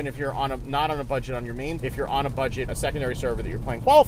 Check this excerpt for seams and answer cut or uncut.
cut